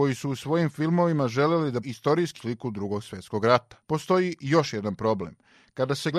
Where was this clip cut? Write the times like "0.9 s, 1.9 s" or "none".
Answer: 1.8 s, 2.4 s, 3.8 s